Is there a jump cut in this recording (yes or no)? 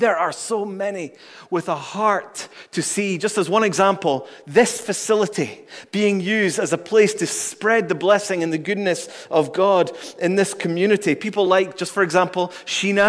no